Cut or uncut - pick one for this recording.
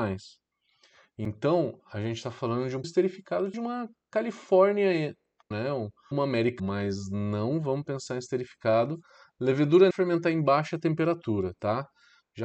cut